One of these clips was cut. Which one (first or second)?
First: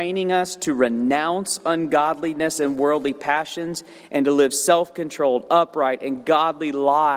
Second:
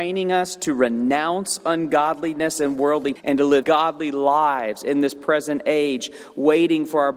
second